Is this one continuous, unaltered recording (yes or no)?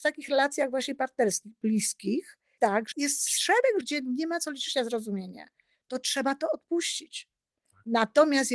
no